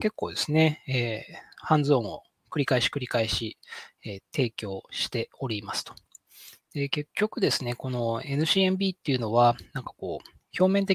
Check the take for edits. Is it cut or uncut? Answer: uncut